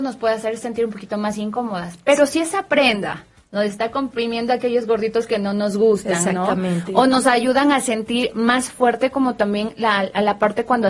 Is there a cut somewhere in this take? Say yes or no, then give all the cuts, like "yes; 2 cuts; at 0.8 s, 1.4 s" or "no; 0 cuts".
no; 0 cuts